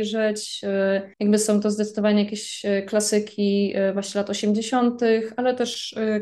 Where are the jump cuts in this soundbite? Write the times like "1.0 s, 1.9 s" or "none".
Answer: 1.1 s

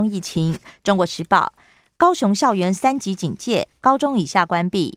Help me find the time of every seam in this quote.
none

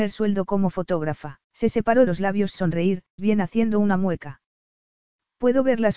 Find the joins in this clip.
1.4 s, 2.1 s, 2.5 s, 3.2 s

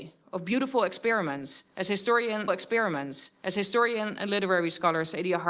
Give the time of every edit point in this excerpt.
2.5 s

